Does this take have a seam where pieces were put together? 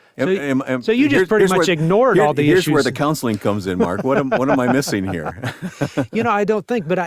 no; 0 cuts

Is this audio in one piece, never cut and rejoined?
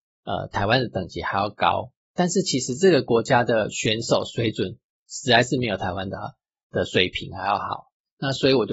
yes; 0 cuts

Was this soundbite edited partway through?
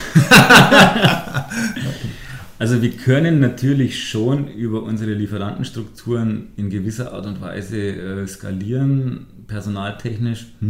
no; 0 cuts

